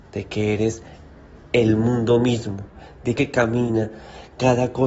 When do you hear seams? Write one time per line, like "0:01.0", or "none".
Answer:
0:03.2